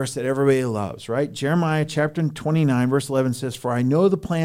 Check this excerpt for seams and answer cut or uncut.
uncut